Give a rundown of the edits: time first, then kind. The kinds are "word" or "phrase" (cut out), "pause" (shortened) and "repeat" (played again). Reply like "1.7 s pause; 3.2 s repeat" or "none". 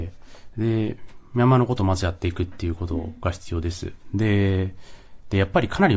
none